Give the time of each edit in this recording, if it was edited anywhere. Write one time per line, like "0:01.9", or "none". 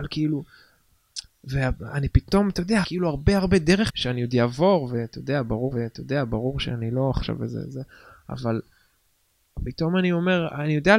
0:02.8
0:03.9
0:05.7